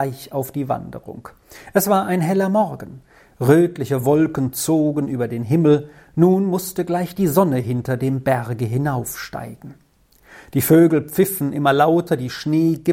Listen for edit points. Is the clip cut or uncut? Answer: uncut